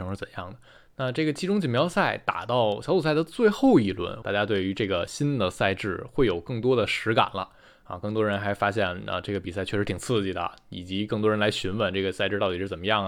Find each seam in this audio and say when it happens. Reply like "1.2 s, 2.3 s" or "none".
4.2 s